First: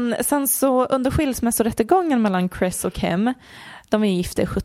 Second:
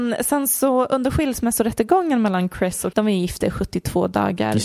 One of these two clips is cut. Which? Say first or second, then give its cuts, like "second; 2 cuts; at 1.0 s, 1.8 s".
second; 1 cut; at 2.9 s